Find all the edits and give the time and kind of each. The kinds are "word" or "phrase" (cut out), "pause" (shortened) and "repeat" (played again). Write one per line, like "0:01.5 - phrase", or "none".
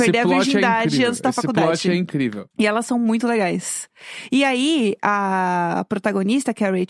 0:02.5 - pause

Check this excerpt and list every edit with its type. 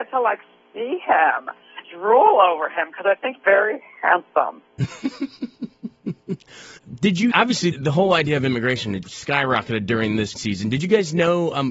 0:01.8 - word
0:03.3 - word
0:07.3 - word
0:07.7 - word
0:09.0 - word
0:10.4 - word

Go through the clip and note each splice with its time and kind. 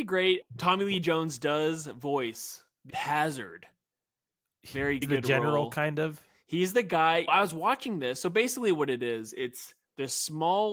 0:02.9 - phrase
0:05.0 - phrase
0:07.3 - word

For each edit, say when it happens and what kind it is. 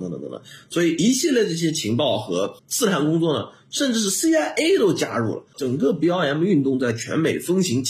0:02.6 - pause

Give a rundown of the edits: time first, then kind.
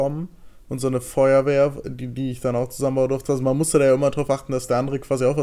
none

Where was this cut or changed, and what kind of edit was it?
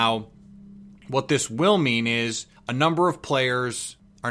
0:02.6 - pause

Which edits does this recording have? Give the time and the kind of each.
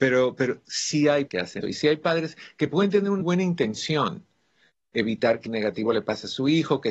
0:01.3 - word
0:01.6 - word
0:03.2 - word
0:05.5 - word

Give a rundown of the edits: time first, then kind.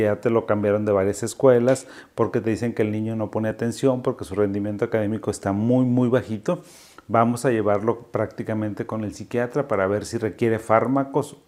none

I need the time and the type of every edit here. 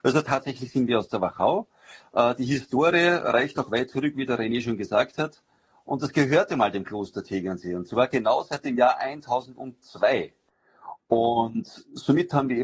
none

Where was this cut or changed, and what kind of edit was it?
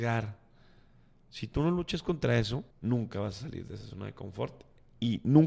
0:02.7 - pause

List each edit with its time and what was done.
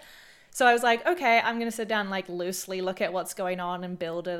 none

